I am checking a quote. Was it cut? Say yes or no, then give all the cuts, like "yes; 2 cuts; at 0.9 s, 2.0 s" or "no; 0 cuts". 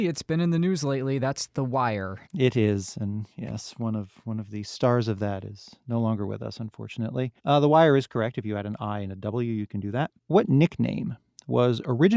yes; 3 cuts; at 2.3 s, 7.4 s, 10.2 s